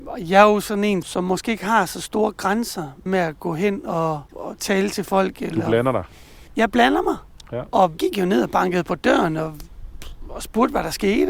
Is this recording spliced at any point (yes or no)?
yes